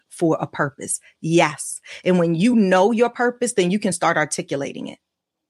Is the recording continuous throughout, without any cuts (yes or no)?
yes